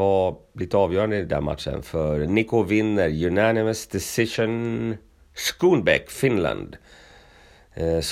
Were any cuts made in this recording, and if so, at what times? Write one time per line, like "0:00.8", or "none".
none